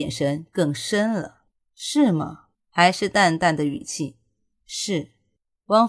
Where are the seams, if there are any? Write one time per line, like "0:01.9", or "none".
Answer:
0:01.5
0:02.5